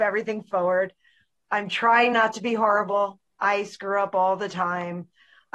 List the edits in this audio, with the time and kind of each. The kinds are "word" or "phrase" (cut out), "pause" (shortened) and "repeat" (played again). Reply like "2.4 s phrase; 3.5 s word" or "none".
none